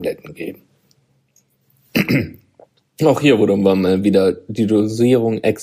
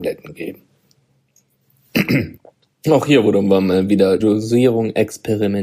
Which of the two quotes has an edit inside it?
second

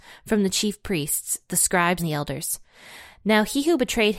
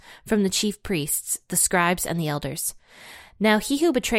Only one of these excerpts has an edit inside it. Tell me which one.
first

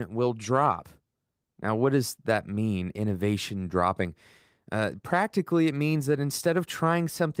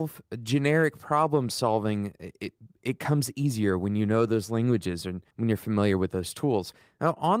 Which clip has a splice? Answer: second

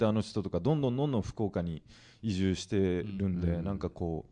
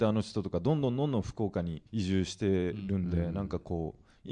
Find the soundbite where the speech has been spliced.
second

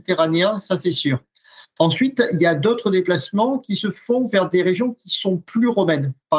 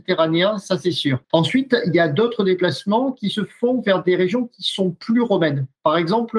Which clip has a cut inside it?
second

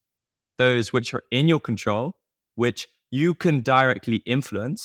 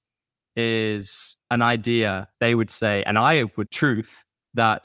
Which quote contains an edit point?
second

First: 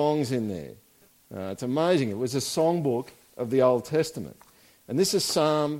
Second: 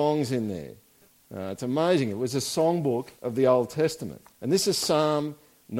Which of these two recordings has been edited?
second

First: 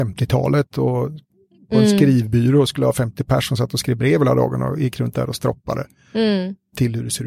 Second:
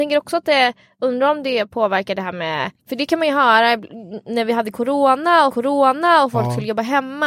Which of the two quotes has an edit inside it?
second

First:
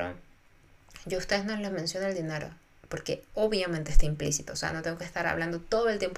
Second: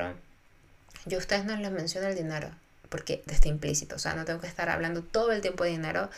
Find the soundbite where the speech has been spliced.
second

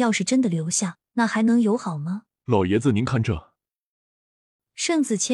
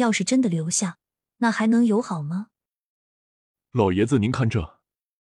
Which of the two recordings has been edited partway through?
first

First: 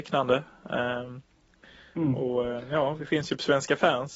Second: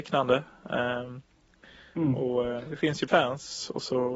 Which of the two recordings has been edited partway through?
second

